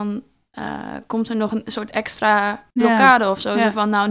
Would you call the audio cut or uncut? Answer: cut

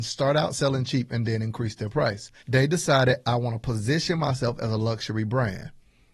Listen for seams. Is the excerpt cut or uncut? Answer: cut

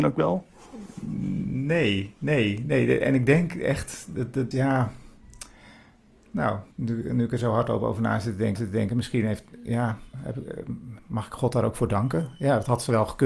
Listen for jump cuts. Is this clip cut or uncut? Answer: cut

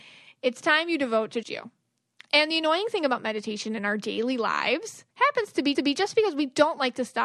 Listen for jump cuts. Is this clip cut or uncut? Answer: cut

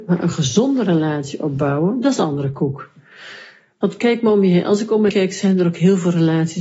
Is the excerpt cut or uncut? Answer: cut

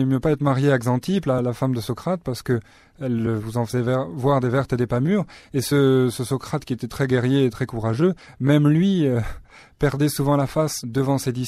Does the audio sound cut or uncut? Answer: uncut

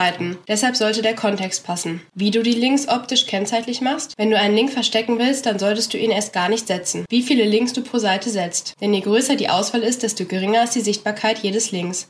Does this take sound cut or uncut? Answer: uncut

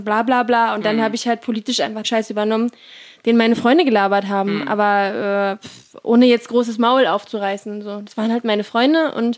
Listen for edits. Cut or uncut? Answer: cut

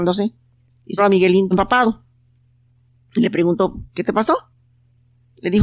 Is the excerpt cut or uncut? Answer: cut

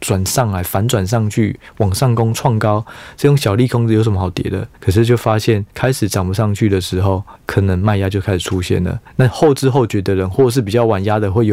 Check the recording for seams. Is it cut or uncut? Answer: cut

